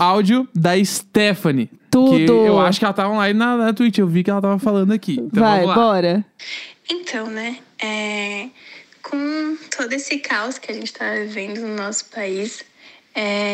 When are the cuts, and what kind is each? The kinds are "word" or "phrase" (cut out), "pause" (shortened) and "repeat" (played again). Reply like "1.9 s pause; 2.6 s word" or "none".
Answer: none